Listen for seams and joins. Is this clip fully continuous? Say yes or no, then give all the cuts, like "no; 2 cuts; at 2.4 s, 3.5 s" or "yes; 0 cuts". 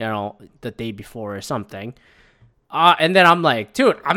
yes; 0 cuts